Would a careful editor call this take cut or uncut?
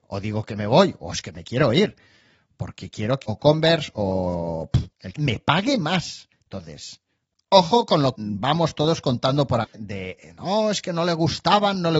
cut